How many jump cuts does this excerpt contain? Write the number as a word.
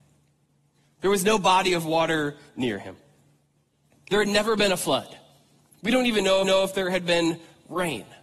one